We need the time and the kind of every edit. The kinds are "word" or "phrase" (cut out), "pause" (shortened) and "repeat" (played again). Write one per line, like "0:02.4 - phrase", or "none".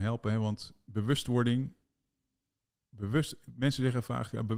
none